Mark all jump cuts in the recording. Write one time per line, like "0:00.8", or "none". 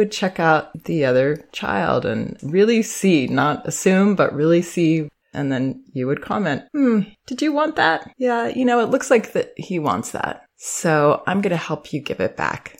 0:05.2
0:06.7
0:08.1

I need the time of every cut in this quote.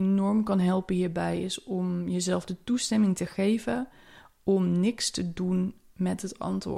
none

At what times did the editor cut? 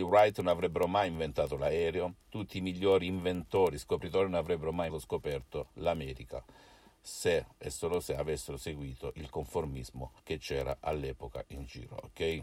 0:02.2
0:04.9
0:07.5
0:10.2

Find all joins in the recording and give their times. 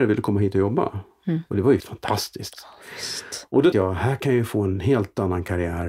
0:01.8
0:03.7

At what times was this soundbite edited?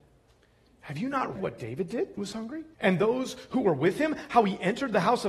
0:01.4
0:02.2
0:02.7

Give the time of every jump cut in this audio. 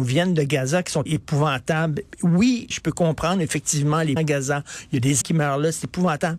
0:01.1
0:02.7
0:04.2
0:05.2

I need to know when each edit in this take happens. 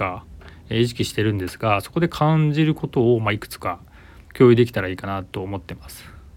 0:04.2

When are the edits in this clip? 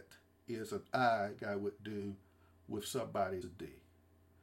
0:01.4
0:03.4

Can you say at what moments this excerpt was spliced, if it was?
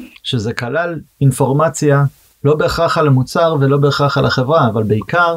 0:01.1

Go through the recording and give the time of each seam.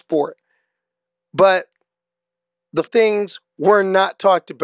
0:02.9

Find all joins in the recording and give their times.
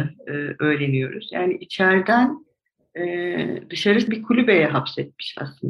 0:04.1

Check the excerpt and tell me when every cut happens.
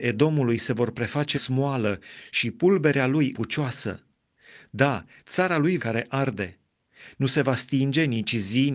0:01.3
0:03.3
0:05.8

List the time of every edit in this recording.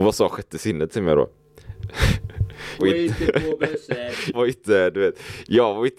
0:02.8
0:04.3

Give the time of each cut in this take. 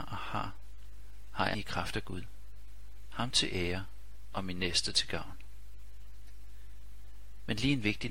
0:01.5

